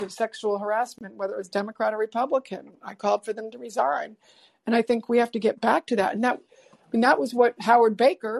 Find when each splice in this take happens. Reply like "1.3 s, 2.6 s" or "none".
none